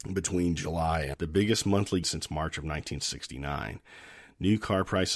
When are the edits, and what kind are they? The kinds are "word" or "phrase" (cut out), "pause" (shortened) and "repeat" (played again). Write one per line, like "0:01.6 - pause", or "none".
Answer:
0:01.1 - word
0:02.0 - word